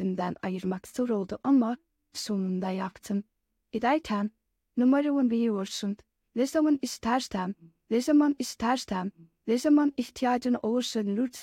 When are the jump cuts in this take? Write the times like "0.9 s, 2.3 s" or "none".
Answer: 8.4 s